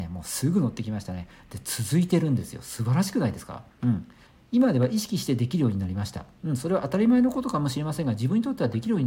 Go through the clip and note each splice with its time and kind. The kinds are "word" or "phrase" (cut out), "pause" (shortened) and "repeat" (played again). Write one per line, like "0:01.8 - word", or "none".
0:03.7 - pause
0:04.3 - pause